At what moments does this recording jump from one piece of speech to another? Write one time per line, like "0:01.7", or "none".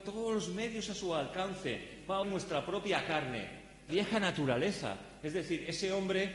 0:02.2
0:03.9